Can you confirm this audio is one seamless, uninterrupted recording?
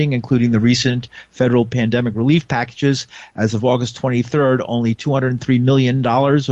yes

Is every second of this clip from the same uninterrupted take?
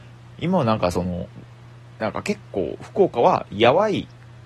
yes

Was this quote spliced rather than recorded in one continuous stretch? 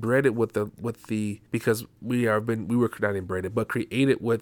yes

